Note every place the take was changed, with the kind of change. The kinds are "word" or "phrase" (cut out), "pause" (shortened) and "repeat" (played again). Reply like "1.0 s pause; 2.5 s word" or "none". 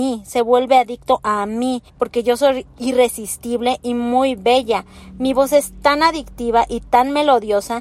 1.9 s pause